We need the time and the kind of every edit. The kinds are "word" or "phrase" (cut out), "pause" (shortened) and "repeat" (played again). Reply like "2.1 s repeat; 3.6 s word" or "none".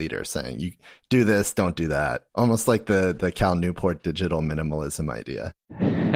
none

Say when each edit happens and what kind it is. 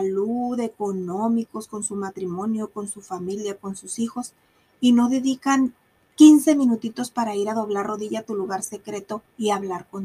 none

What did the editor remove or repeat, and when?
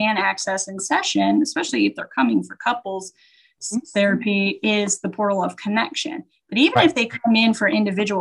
none

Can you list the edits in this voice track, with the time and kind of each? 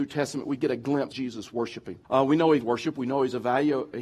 1.1 s word; 2.0 s pause; 2.6 s word

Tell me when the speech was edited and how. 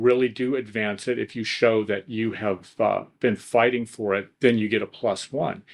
4.3 s pause

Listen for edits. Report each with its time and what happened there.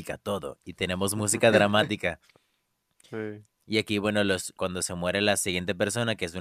4.6 s word

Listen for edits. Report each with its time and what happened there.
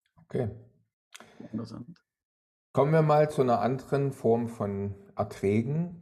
none

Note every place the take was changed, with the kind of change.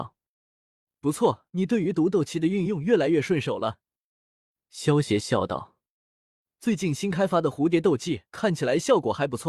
1.5 s pause; 8.3 s pause

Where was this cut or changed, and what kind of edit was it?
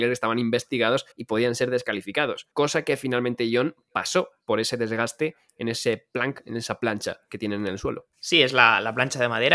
1.1 s pause; 2.5 s pause; 8.1 s pause

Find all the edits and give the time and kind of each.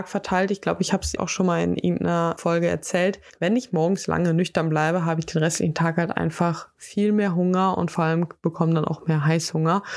1.2 s word

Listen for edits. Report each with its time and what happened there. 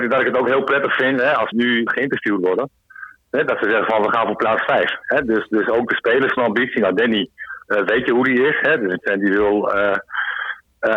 1.5 s word; 1.9 s word; 6.4 s word; 7.6 s pause; 9.0 s word

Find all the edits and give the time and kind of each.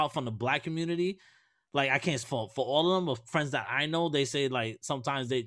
2.2 s phrase

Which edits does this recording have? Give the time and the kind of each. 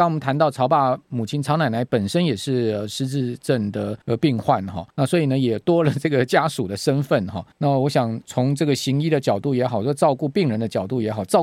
4.0 s pause; 4.9 s pause; 7.5 s pause; 8.2 s word

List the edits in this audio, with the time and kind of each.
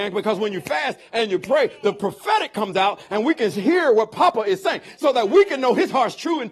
none

